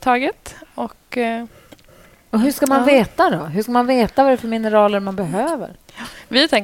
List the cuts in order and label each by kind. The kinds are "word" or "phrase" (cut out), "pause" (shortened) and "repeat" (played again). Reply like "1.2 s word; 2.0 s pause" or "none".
none

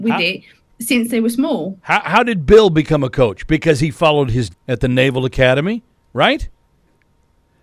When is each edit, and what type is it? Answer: 4.5 s word

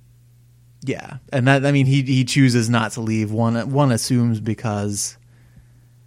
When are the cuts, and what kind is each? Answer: none

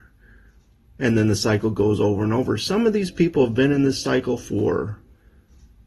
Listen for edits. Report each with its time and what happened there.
none

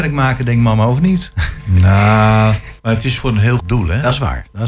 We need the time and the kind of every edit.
2.8 s pause; 3.2 s word; 3.6 s word

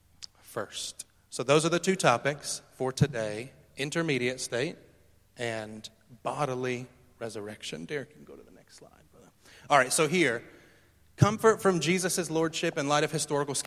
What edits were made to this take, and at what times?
1.1 s pause

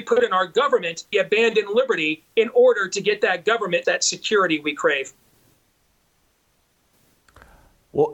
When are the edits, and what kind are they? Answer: 1.1 s phrase; 3.8 s phrase

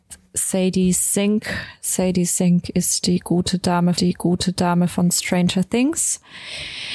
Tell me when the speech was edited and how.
3.9 s repeat

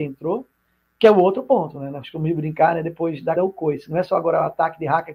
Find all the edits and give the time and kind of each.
3.4 s word

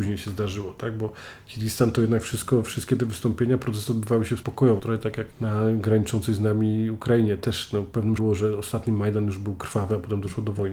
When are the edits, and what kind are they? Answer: 4.4 s word; 4.8 s word; 5.3 s pause; 8.2 s word

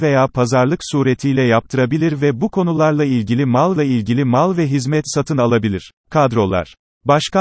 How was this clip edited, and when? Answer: 3.8 s repeat; 6.0 s pause

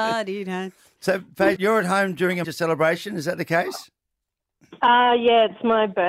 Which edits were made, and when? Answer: 1.6 s word; 2.4 s word

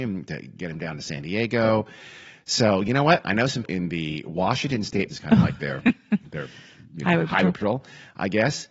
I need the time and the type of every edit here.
3.6 s word; 5.1 s phrase

